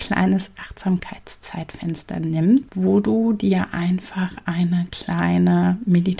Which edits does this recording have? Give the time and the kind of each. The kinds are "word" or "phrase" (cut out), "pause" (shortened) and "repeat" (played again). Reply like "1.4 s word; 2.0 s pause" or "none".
none